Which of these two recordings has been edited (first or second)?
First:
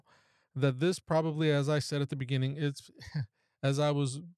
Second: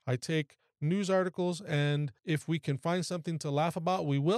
second